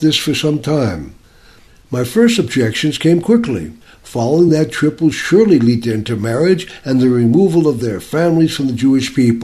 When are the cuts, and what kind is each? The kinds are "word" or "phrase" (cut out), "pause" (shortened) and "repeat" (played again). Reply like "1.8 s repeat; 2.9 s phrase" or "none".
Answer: none

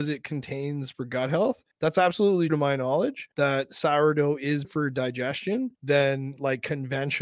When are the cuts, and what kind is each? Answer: 0.9 s word; 1.7 s pause; 2.5 s word; 3.3 s pause; 4.6 s word; 5.8 s pause

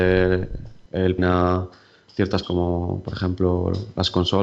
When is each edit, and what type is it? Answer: 1.2 s word; 2.4 s word

